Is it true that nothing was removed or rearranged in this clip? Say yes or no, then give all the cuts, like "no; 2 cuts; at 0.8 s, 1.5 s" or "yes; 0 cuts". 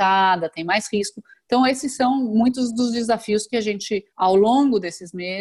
no; 1 cut; at 4.1 s